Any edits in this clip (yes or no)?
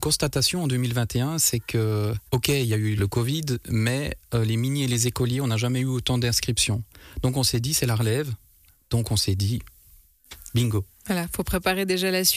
yes